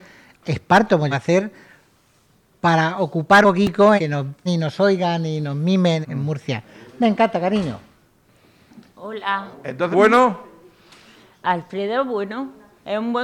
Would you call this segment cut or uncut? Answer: cut